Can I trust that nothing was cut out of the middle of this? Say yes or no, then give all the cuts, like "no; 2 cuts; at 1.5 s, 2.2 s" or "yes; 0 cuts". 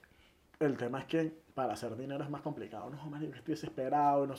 yes; 0 cuts